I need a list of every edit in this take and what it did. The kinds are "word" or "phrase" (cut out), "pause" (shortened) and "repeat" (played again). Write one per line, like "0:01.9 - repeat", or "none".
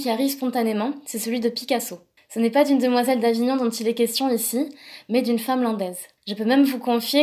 0:02.2 - pause
0:06.2 - pause